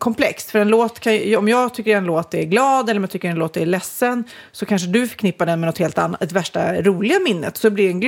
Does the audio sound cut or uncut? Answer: uncut